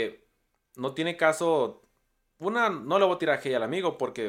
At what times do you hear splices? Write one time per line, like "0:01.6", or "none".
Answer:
none